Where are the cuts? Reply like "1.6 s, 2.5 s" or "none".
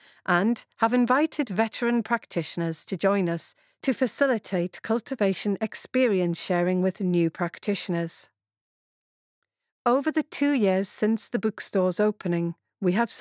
none